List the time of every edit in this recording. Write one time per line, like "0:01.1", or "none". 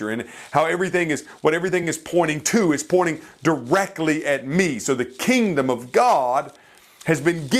none